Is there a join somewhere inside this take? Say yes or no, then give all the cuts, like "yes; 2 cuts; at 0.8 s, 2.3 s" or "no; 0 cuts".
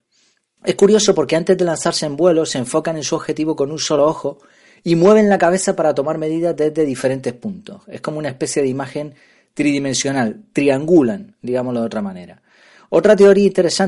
no; 0 cuts